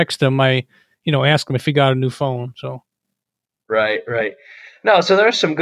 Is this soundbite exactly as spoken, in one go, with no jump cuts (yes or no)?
yes